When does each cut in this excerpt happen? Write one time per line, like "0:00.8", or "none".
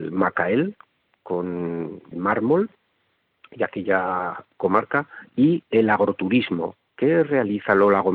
0:02.1